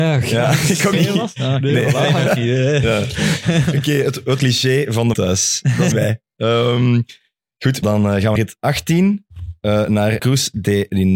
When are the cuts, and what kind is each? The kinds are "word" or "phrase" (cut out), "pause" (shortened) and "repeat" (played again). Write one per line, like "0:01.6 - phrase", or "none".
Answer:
0:00.9 - word
0:02.4 - word
0:04.4 - word
0:05.1 - word
0:05.9 - word
0:07.8 - word
0:08.4 - word
0:10.2 - word